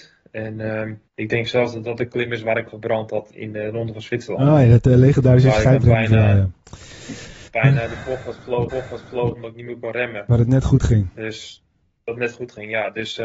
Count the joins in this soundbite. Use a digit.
4